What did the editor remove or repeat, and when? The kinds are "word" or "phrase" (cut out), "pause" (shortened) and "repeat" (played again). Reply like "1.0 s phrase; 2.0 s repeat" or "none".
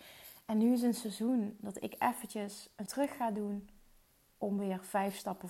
2.9 s word